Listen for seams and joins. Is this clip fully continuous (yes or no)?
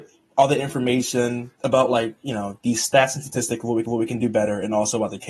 no